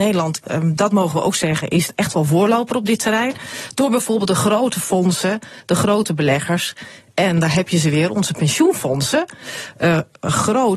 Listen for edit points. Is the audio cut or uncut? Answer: uncut